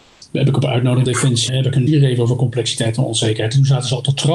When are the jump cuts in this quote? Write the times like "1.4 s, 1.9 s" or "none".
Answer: 1.0 s, 1.5 s, 1.9 s